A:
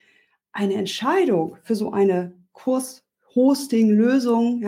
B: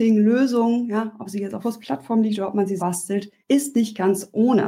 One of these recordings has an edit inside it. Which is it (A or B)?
B